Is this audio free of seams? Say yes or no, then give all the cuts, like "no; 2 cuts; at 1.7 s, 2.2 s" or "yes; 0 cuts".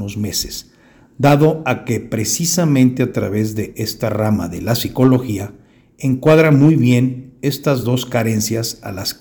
yes; 0 cuts